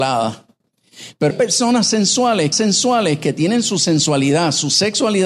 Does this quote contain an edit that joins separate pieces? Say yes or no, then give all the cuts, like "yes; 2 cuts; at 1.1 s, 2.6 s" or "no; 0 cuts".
yes; 2 cuts; at 1.3 s, 2.5 s